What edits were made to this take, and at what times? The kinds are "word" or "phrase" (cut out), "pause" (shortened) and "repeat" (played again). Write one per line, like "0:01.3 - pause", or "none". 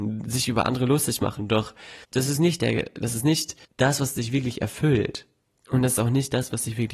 0:02.0 - pause
0:03.6 - pause